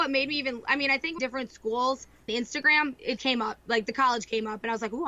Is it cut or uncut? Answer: cut